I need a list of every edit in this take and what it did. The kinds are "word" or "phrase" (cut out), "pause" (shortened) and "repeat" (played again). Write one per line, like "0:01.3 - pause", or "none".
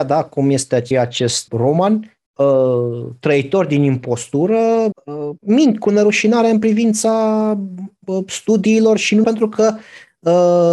0:00.9 - word
0:01.5 - word
0:02.3 - pause
0:04.9 - word
0:05.4 - pause
0:09.2 - word